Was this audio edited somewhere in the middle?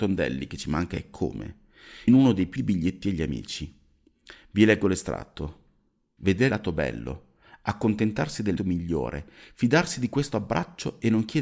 yes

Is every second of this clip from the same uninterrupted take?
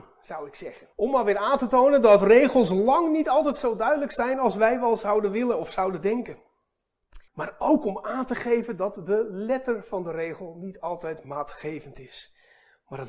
no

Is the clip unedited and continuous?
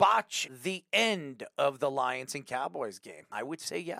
yes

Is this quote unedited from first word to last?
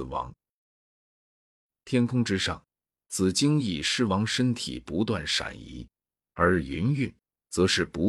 yes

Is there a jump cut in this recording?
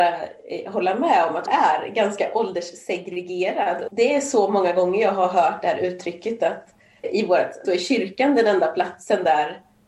yes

